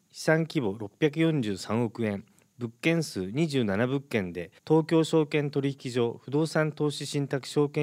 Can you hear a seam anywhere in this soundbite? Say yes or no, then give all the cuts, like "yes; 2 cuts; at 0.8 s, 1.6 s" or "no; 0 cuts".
yes; 1 cut; at 4.6 s